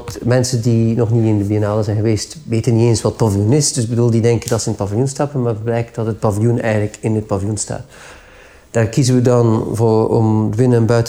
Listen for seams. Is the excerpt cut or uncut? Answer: uncut